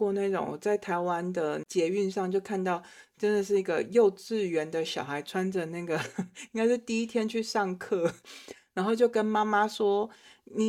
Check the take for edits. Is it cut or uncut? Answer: cut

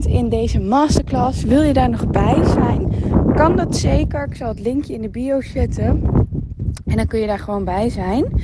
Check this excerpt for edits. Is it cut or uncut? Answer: uncut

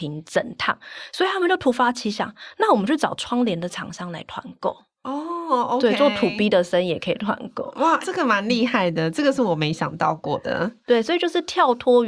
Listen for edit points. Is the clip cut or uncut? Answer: cut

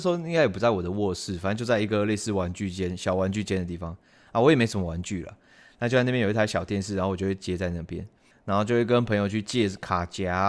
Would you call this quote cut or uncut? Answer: cut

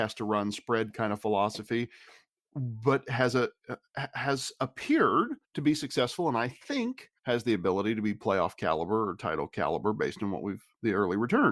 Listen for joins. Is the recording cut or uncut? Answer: cut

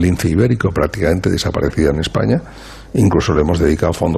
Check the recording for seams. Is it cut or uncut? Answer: uncut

